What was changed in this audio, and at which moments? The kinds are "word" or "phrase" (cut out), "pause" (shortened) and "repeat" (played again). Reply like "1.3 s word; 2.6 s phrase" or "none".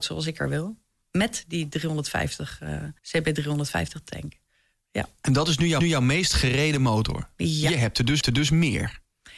3.0 s pause; 5.8 s repeat; 8.2 s repeat